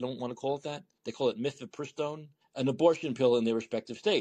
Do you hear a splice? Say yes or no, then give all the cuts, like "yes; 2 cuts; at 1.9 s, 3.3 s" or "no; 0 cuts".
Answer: yes; 1 cut; at 2.4 s